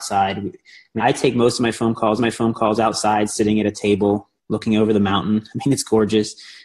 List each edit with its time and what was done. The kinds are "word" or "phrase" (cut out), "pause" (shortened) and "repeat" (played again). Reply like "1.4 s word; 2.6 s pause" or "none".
1.0 s word; 2.2 s repeat